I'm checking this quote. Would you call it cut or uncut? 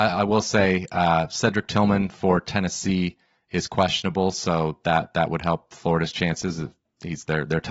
uncut